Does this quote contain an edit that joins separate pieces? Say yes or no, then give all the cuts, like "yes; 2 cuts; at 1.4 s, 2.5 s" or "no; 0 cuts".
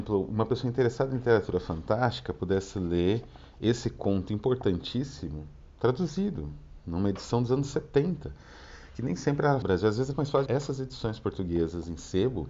yes; 3 cuts; at 9.6 s, 10.1 s, 10.5 s